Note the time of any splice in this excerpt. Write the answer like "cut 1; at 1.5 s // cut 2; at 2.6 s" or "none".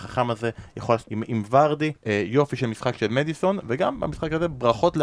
cut 1; at 1.0 s // cut 2; at 2.0 s

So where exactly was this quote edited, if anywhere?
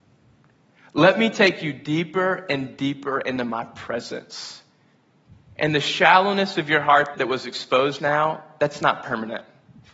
cut 1; at 7.1 s // cut 2; at 8.0 s

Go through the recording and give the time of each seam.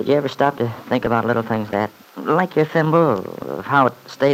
cut 1; at 1.7 s // cut 2; at 2.0 s

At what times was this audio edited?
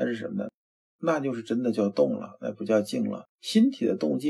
cut 1; at 3.3 s

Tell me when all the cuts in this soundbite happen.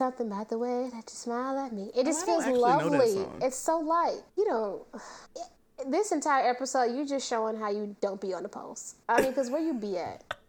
cut 1; at 4.3 s // cut 2; at 5.3 s

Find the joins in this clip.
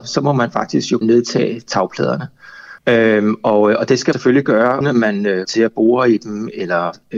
cut 1; at 1.0 s // cut 2; at 2.8 s // cut 3; at 4.1 s // cut 4; at 4.8 s // cut 5; at 5.4 s

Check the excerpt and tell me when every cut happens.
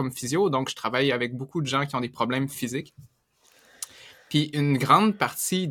none

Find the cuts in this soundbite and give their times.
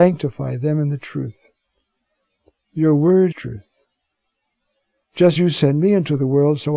cut 1; at 3.3 s // cut 2; at 5.4 s

